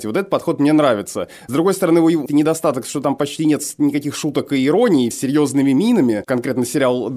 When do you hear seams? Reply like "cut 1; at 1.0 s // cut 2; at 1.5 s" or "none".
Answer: cut 1; at 2.3 s // cut 2; at 5.1 s